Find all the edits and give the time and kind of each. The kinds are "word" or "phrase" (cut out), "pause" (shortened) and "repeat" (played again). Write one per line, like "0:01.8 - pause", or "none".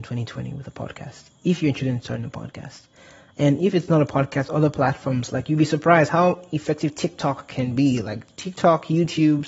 none